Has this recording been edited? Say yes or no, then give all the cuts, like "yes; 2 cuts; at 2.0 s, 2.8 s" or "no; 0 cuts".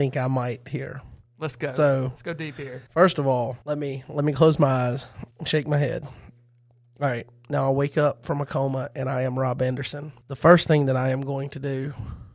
yes; 4 cuts; at 2.9 s, 3.6 s, 5.3 s, 10.2 s